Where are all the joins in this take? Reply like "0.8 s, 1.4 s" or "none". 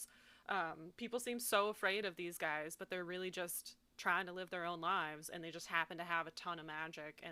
none